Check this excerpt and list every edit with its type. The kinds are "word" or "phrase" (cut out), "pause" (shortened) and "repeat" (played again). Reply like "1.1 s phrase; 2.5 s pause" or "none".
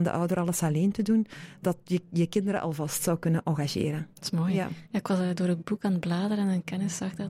1.6 s word

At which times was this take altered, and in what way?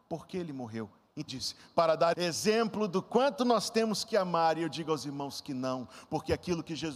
1.3 s word; 2.1 s word

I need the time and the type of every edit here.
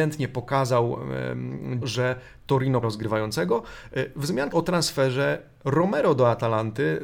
1.8 s word; 2.8 s word; 4.5 s word

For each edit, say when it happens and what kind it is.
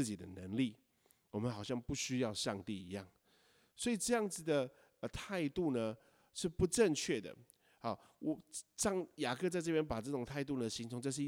none

